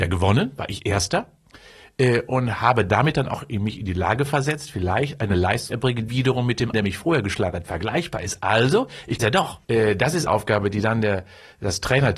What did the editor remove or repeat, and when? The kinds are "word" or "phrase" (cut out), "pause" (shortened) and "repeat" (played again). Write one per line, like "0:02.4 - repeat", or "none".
0:05.7 - word
0:06.1 - word
0:06.7 - word
0:09.2 - word
0:09.6 - pause
0:10.3 - word